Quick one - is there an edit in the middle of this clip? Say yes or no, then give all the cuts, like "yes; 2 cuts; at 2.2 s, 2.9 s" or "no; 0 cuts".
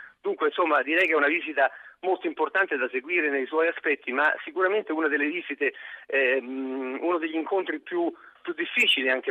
no; 0 cuts